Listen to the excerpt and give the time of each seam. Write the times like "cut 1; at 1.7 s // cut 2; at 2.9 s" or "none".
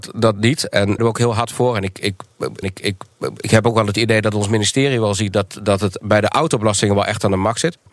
cut 1; at 1.0 s // cut 2; at 2.6 s